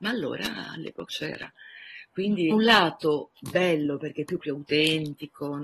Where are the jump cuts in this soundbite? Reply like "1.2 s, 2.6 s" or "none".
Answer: 1.1 s, 2.5 s, 4.4 s